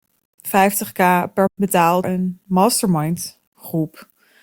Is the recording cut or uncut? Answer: cut